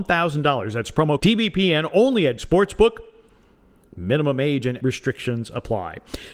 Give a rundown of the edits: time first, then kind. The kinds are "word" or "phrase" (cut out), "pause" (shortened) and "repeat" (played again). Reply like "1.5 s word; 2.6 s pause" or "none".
1.2 s word; 2.4 s word; 4.8 s word